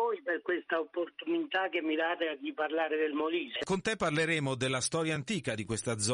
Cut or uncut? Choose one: uncut